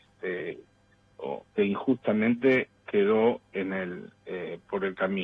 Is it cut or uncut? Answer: cut